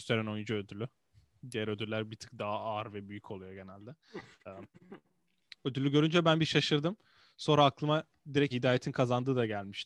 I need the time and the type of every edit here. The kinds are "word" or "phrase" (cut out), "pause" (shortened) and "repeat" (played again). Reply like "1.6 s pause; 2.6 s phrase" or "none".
8.5 s word